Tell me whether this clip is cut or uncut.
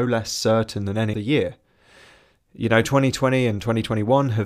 cut